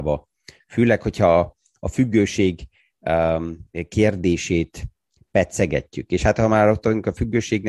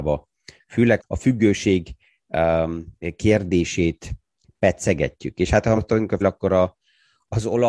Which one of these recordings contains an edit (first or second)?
second